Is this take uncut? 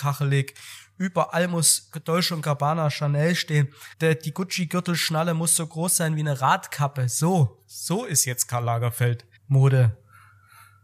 no; 2 cuts; at 3.9 s, 9.4 s

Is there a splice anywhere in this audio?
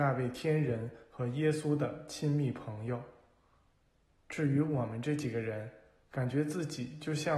no; 0 cuts

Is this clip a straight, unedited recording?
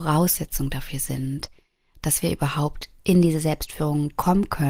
yes; 0 cuts

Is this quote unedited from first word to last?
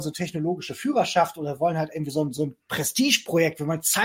yes; 0 cuts

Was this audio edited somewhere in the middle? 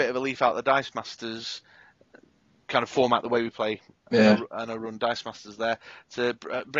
no; 0 cuts

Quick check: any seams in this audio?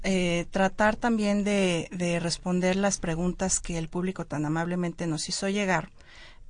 no; 0 cuts

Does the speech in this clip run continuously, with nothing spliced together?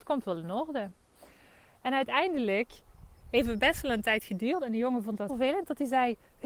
no; 1 cut; at 5.3 s

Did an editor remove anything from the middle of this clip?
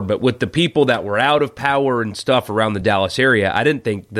no; 0 cuts

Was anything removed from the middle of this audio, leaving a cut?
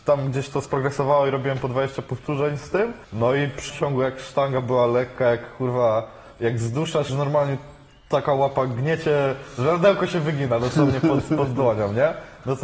yes; 3 cuts; at 3.0 s, 3.7 s, 7.1 s

